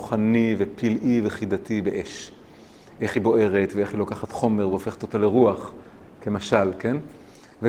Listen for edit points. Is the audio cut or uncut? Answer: uncut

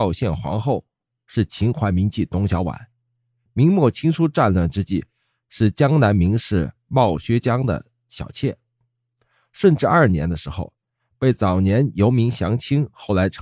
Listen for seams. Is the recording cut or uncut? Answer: uncut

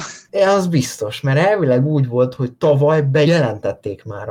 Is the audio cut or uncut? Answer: cut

